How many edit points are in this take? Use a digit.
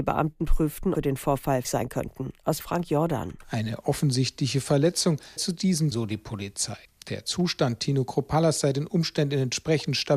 6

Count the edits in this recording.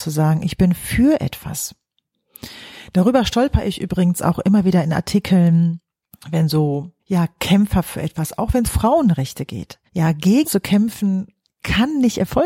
5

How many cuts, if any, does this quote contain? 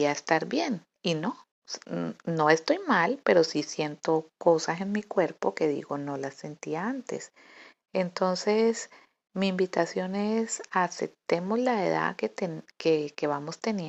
0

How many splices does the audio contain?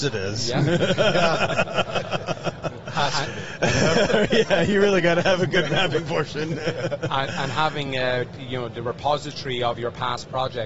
0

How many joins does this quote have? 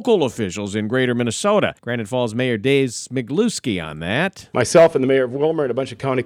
1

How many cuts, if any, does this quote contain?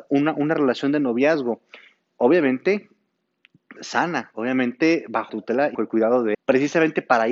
4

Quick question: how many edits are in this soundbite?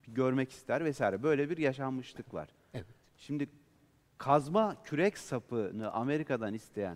0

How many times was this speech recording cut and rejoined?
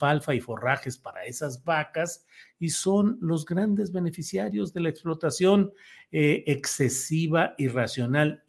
0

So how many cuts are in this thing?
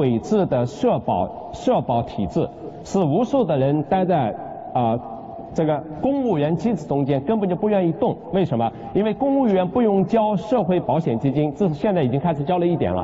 0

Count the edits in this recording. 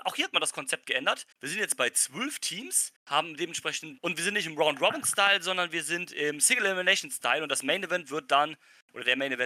3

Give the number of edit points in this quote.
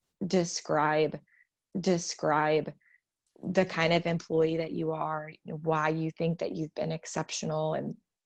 1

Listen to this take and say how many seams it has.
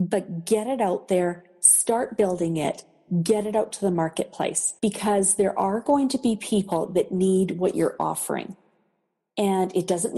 1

